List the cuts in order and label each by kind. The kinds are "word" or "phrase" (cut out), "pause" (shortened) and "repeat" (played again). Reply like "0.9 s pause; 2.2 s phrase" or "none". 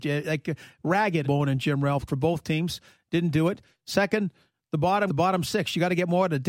1.2 s phrase; 2.1 s phrase; 5.1 s word